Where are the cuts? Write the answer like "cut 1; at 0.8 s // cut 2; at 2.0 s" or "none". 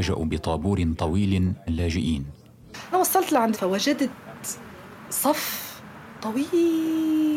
cut 1; at 1.7 s // cut 2; at 2.9 s // cut 3; at 3.5 s